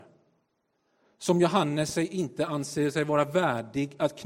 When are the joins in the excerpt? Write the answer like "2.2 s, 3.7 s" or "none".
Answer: none